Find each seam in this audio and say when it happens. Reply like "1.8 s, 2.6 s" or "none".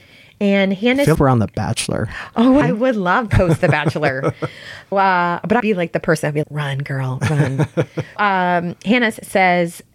1.1 s, 2.6 s, 3.3 s, 4.9 s, 5.6 s, 6.4 s, 8.2 s